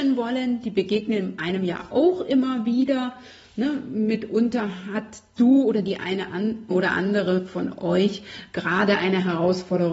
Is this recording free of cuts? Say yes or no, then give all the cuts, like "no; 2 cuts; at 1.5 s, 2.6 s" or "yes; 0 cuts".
no; 2 cuts; at 5.4 s, 6.7 s